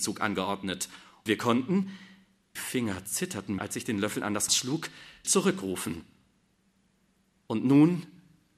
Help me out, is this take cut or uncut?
cut